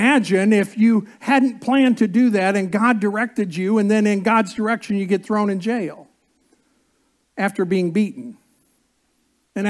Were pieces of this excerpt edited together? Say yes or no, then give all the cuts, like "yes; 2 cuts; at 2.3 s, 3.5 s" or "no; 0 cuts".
no; 0 cuts